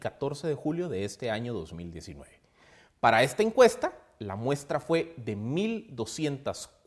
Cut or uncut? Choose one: uncut